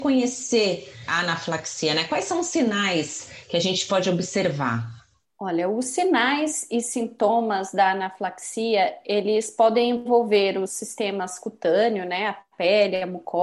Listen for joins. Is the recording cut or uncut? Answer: uncut